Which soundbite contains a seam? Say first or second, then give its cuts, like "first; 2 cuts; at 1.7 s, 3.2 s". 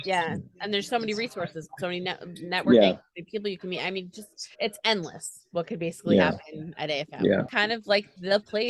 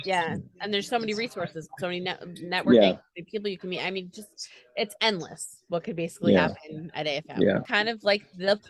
first; 1 cut; at 4.5 s